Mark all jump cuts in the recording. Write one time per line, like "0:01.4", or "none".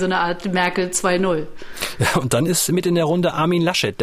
none

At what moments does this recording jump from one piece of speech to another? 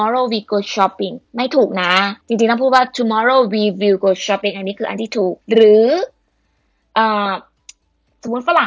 0:01.2
0:02.2
0:05.4

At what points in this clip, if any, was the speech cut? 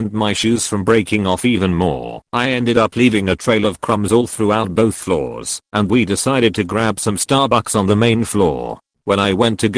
0:02.3
0:05.9

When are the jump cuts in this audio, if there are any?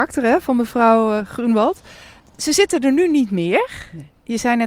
none

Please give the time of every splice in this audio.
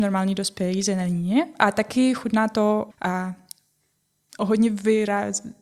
0:02.9

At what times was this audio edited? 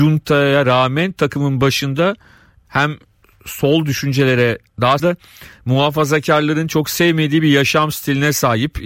0:05.0

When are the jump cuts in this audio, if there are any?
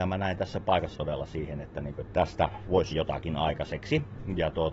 0:00.9
0:02.1
0:02.9

